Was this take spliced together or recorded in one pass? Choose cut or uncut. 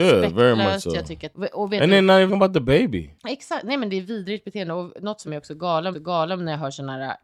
cut